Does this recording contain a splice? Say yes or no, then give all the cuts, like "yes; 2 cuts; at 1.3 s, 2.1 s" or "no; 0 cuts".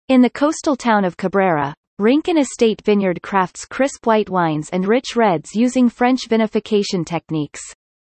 no; 0 cuts